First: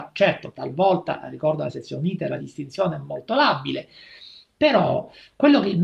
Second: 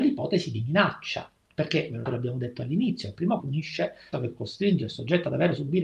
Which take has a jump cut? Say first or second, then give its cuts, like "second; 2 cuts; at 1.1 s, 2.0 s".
second; 3 cuts; at 2.1 s, 3.4 s, 4.1 s